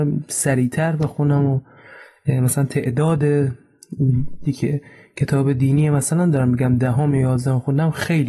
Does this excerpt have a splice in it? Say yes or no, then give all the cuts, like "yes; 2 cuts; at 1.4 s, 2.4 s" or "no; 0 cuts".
yes; 1 cut; at 4.5 s